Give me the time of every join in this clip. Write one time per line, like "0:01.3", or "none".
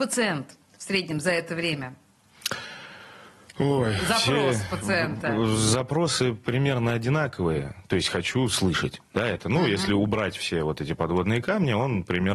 none